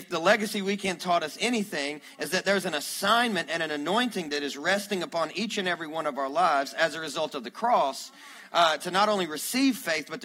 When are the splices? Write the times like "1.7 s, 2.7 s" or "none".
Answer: none